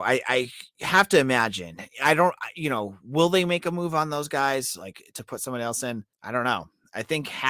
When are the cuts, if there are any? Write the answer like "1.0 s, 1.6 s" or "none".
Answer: 6.1 s